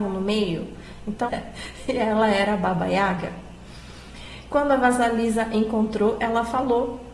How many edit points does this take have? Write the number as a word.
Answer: one